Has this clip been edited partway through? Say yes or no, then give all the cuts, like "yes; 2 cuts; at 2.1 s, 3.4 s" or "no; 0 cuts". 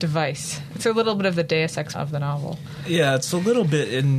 yes; 1 cut; at 1.9 s